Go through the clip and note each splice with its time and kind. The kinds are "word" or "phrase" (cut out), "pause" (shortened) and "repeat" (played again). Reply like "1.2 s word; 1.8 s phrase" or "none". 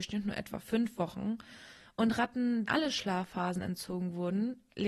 2.6 s word